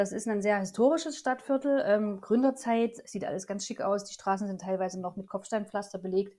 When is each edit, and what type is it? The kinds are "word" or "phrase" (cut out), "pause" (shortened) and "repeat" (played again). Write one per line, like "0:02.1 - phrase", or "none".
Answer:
none

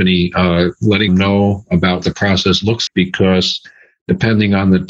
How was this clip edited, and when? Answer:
0:01.1 - word
0:02.0 - word
0:02.9 - word

